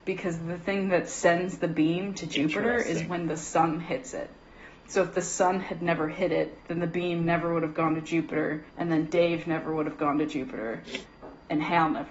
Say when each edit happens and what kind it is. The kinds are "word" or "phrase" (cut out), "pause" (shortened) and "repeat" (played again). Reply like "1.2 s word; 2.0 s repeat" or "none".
6.6 s pause; 8.7 s pause

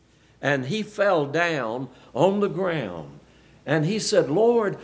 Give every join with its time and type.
none

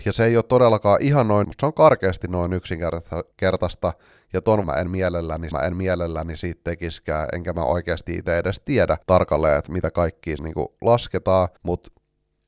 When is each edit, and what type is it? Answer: 1.4 s word; 3.3 s pause; 4.6 s word; 5.5 s repeat; 9.0 s pause; 10.4 s word; 11.6 s pause

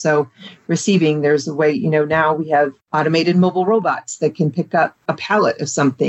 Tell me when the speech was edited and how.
2.8 s pause; 5.0 s pause

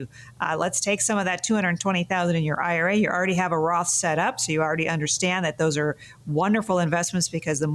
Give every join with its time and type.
none

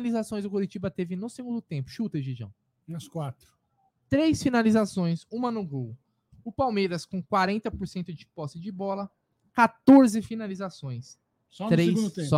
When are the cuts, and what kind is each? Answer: none

